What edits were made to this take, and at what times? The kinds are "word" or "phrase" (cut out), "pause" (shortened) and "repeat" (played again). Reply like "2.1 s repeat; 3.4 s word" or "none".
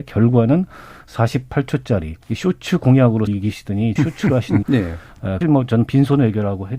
2.2 s pause; 3.3 s word; 4.0 s word; 4.6 s phrase; 5.4 s phrase